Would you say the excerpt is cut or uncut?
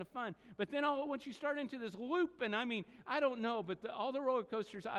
uncut